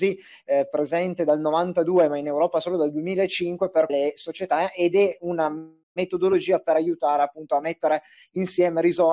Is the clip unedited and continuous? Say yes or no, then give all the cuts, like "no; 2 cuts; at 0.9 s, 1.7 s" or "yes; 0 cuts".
no; 2 cuts; at 3.9 s, 5.8 s